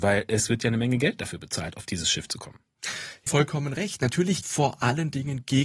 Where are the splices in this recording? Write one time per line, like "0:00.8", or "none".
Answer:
0:03.3
0:04.4